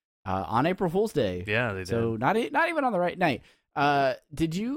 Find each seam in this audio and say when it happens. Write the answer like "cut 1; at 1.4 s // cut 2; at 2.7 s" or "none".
none